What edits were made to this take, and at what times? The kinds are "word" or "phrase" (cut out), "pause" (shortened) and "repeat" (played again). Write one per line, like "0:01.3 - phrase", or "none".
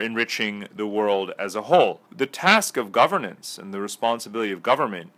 0:02.0 - pause